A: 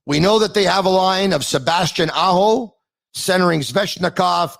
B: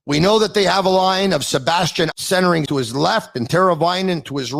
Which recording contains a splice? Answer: B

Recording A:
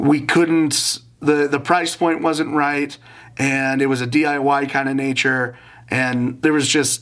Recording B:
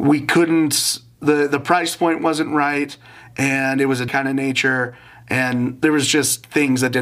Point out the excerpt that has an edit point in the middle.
B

